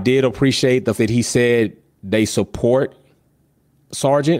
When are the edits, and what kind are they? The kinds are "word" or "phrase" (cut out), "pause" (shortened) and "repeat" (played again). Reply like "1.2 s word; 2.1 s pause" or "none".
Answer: 1.0 s word